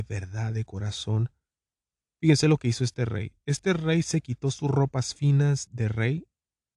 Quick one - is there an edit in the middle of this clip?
yes; 1 cut; at 5.7 s

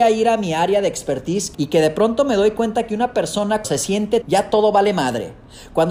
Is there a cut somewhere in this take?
yes; 3 cuts; at 1.5 s, 3.6 s, 4.2 s

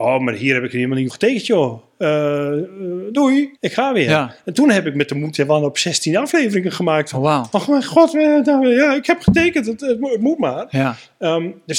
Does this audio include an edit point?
yes; 2 cuts; at 1.1 s, 3.6 s

